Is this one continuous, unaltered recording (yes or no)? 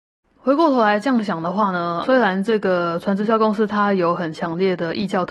no